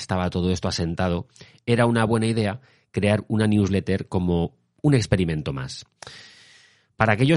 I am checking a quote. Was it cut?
no; 0 cuts

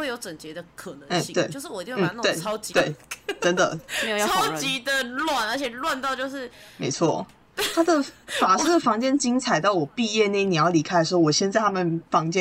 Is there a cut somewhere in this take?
yes; 1 cut; at 2.7 s

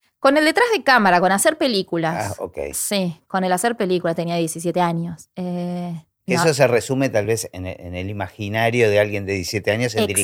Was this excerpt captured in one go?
yes; 0 cuts

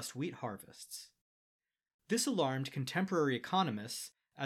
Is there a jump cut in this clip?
no; 0 cuts

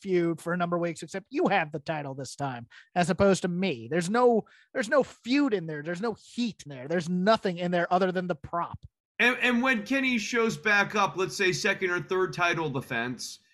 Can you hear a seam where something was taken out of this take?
yes; 1 cut; at 6.7 s

